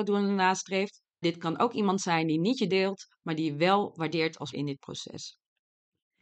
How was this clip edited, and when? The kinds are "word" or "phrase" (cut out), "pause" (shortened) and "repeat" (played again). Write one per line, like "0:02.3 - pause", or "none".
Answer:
0:01.2 - word
0:02.7 - word
0:04.5 - word